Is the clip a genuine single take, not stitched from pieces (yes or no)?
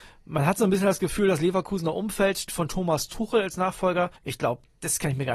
no